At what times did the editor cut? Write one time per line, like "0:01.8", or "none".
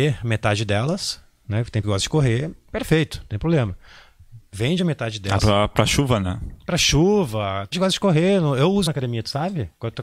0:01.8
0:05.4
0:07.7
0:08.9

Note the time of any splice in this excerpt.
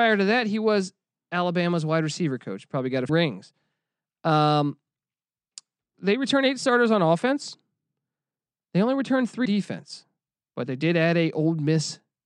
0:03.1
0:05.9
0:09.5

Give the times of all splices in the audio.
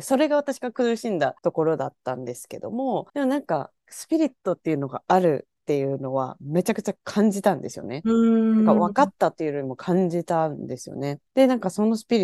0:01.4
0:03.1
0:03.8
0:04.4
0:07.0
0:11.3

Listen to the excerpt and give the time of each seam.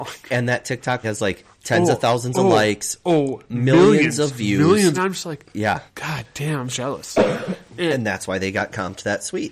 0:01.0
0:01.5
0:04.9
0:05.9
0:06.7

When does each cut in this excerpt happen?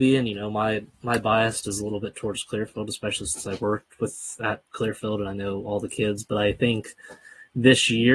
none

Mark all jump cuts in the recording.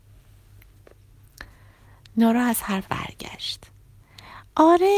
0:02.8

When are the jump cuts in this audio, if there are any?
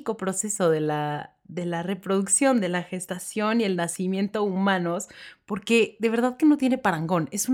none

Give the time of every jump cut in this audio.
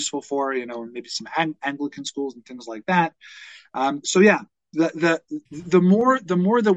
0:05.5

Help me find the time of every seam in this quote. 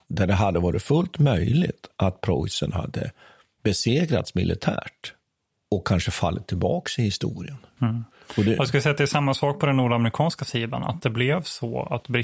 none

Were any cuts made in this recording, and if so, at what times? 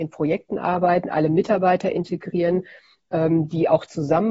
none

